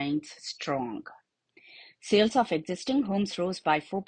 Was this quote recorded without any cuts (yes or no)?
yes